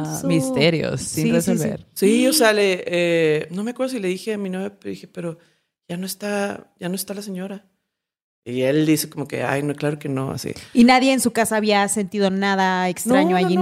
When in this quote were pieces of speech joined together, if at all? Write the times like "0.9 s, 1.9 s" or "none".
none